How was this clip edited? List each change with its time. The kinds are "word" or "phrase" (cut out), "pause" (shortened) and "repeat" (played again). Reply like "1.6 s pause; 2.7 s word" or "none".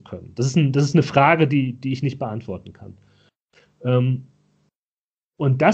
none